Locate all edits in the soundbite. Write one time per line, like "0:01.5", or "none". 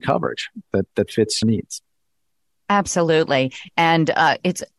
0:01.4